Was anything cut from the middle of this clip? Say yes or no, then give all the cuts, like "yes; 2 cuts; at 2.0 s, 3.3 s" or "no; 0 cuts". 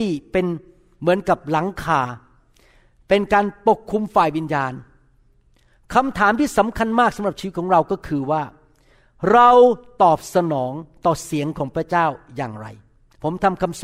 no; 0 cuts